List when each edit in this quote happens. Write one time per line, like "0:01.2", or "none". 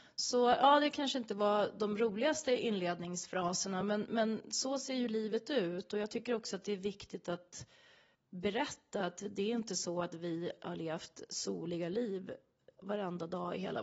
none